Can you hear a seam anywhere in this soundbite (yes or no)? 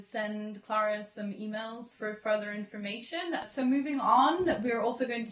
no